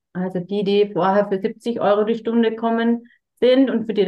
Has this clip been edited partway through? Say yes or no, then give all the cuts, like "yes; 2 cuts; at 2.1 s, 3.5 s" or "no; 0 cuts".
no; 0 cuts